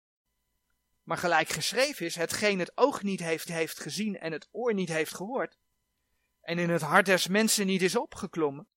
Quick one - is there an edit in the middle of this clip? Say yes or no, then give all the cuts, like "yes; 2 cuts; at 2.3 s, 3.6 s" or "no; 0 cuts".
yes; 1 cut; at 3.5 s